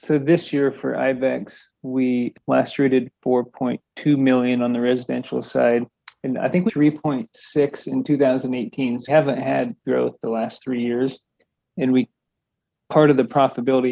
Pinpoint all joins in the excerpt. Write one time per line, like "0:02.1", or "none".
0:06.7
0:09.1
0:09.8